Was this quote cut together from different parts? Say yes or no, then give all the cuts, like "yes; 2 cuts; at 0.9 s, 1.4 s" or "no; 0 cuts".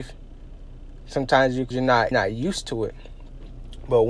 yes; 2 cuts; at 1.7 s, 2.1 s